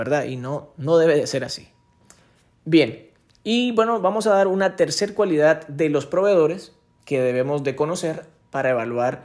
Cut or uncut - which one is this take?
uncut